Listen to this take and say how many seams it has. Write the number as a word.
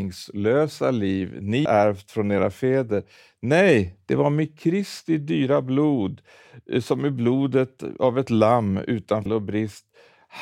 two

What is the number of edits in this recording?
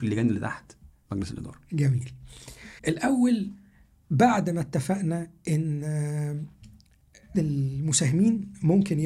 two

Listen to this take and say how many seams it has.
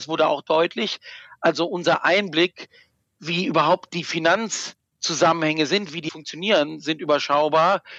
one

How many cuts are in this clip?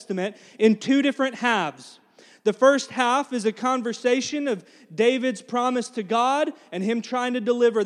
zero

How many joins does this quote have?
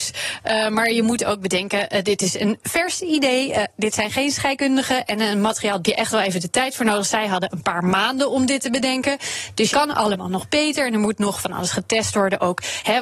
two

